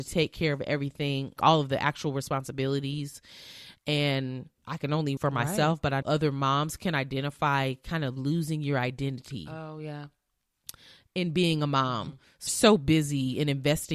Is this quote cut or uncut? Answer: cut